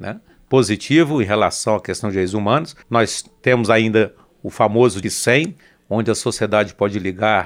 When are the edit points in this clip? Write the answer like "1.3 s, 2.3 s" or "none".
2.8 s, 5.0 s